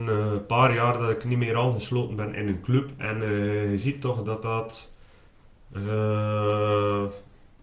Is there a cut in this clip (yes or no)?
no